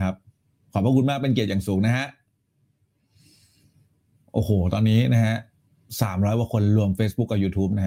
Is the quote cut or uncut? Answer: uncut